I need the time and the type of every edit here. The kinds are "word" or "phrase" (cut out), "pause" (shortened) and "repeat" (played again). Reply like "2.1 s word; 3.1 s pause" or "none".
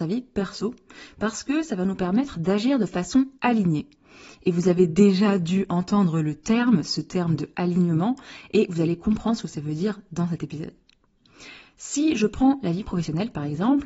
3.4 s pause